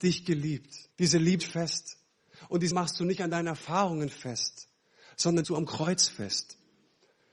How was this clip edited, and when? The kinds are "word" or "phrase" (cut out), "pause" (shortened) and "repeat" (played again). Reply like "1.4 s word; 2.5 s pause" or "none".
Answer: 0.9 s pause; 1.4 s word; 2.7 s word; 5.4 s phrase

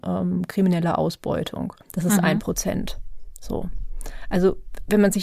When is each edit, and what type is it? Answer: 1.8 s pause

